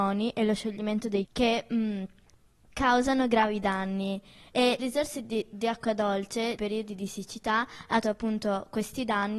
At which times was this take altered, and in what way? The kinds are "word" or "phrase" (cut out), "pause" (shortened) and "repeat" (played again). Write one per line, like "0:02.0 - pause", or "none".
0:01.2 - word
0:04.8 - word
0:06.6 - word
0:08.0 - word